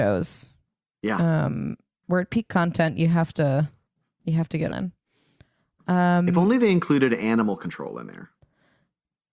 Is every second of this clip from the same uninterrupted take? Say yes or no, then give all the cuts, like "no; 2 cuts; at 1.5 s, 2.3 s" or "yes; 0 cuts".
no; 1 cut; at 4.7 s